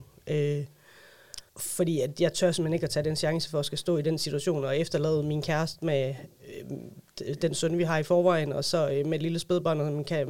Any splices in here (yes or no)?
yes